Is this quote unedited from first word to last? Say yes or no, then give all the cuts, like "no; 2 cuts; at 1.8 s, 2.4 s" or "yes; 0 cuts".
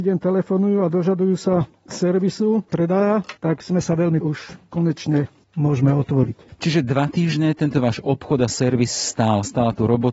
no; 3 cuts; at 2.7 s, 3.4 s, 4.2 s